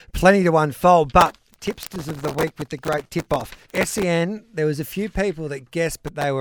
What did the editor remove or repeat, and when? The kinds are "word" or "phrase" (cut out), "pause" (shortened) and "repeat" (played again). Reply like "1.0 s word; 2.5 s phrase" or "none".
3.6 s pause